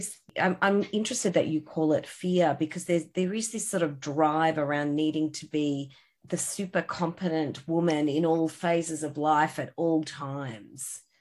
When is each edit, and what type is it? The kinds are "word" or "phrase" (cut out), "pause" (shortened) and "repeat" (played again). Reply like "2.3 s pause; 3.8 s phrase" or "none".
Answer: 6.2 s word